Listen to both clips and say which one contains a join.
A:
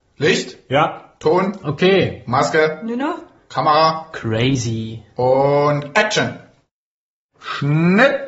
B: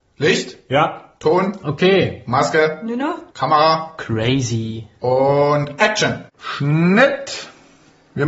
B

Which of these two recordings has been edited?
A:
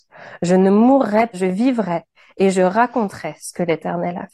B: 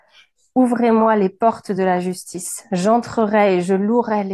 A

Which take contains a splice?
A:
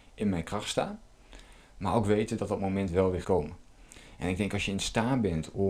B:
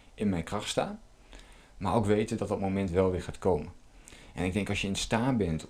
A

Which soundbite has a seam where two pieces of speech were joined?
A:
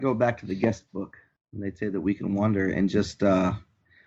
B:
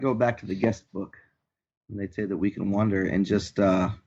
A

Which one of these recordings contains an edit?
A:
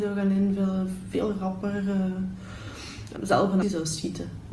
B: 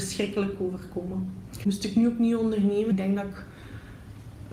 A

